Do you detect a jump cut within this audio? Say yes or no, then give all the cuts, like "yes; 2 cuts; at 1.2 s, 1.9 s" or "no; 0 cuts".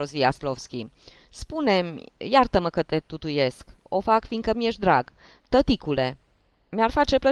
yes; 1 cut; at 5.4 s